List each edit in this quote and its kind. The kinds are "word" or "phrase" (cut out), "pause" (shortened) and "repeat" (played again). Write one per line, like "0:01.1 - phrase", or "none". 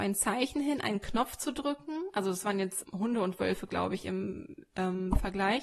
0:02.8 - word